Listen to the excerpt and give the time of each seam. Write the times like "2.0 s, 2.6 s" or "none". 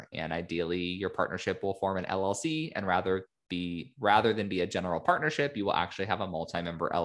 none